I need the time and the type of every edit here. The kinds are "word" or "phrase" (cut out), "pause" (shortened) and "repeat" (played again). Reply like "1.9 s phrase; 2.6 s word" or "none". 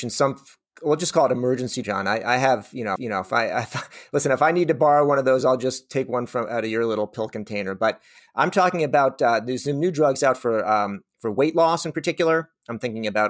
1.8 s word; 3.0 s repeat